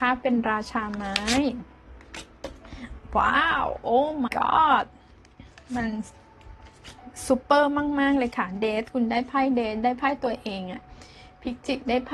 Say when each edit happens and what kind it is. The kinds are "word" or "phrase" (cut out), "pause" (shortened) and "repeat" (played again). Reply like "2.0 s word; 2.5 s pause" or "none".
4.3 s word